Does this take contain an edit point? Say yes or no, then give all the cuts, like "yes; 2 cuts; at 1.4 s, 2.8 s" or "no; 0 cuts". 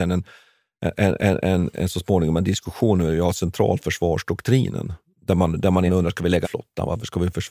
yes; 3 cuts; at 1.2 s, 5.9 s, 6.4 s